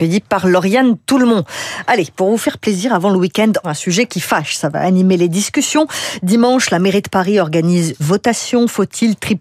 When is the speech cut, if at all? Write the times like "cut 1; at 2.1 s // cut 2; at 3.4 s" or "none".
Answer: cut 1; at 3.6 s // cut 2; at 8.0 s